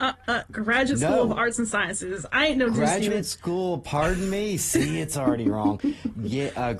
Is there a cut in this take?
no; 0 cuts

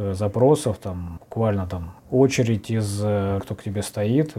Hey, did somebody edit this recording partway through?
yes; 3 cuts; at 1.2 s, 2.0 s, 3.4 s

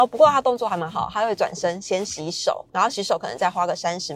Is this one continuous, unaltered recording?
no; 1 cut; at 2.7 s

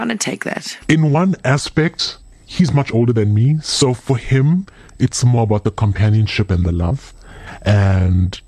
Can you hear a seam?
no; 0 cuts

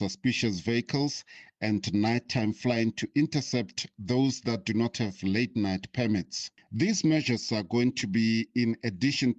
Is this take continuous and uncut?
yes; 0 cuts

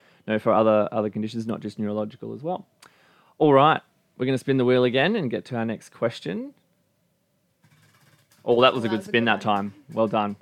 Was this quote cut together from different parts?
no; 0 cuts

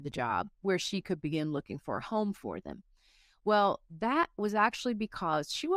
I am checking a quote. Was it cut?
no; 0 cuts

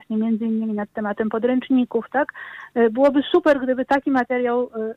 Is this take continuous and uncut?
yes; 0 cuts

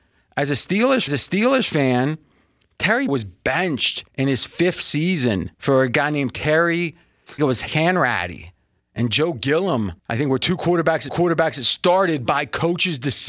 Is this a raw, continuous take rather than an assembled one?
no; 8 cuts; at 1.1 s, 3.1 s, 4.1 s, 5.5 s, 7.4 s, 8.8 s, 10.0 s, 11.1 s

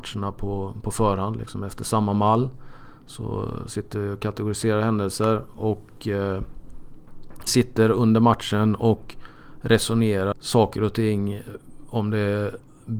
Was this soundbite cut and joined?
yes; 2 cuts; at 7.5 s, 10.3 s

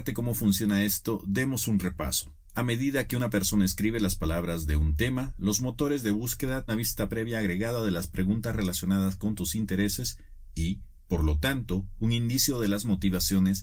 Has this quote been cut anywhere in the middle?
yes; 1 cut; at 6.7 s

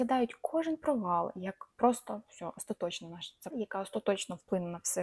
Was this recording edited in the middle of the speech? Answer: yes; 2 cuts; at 1.7 s, 3.5 s

